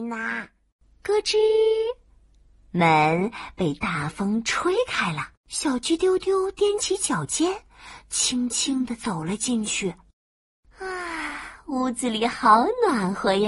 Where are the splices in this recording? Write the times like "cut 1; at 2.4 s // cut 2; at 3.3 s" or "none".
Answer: cut 1; at 5.4 s